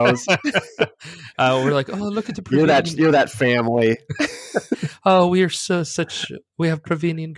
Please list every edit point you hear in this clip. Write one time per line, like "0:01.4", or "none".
none